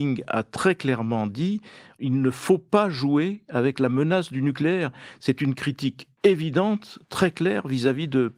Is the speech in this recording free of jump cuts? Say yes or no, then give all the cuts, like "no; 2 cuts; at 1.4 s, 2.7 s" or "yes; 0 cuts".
no; 1 cut; at 6.1 s